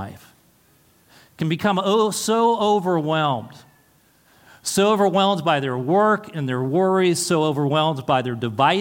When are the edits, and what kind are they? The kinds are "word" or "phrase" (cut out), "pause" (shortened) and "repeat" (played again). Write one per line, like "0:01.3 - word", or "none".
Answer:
none